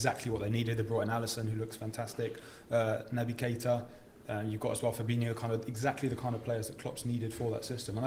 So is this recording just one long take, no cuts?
yes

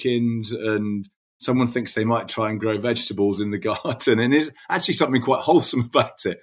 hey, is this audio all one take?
yes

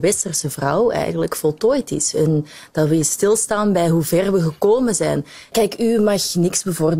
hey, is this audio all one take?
yes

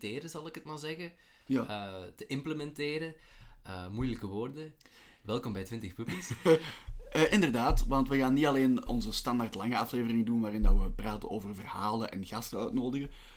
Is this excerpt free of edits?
no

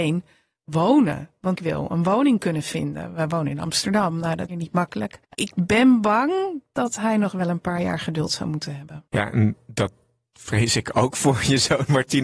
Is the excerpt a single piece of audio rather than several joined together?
no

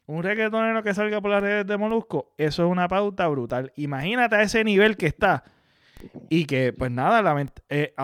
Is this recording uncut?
yes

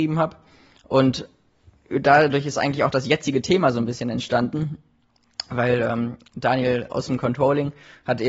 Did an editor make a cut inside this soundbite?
no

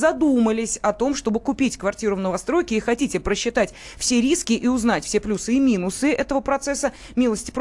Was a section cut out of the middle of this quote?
no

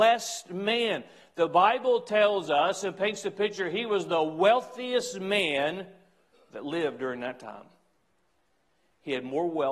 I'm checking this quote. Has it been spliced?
no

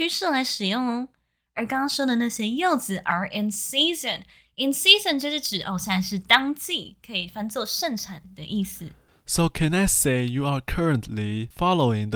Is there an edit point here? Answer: no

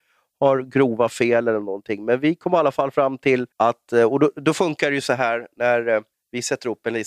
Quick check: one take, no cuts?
no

